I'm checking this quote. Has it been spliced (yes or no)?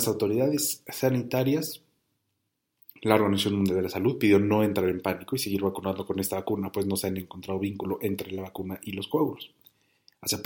no